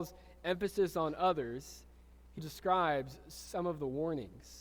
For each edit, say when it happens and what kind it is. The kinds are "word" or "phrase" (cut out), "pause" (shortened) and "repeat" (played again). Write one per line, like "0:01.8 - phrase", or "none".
0:02.4 - word